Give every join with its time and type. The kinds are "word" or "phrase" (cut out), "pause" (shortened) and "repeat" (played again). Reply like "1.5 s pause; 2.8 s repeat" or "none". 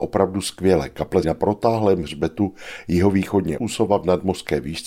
1.2 s word; 3.6 s word